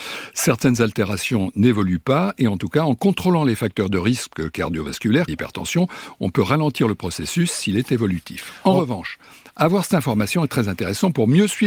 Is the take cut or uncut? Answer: cut